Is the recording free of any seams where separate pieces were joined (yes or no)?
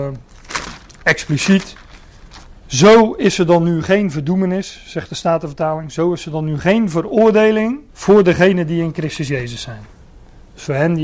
no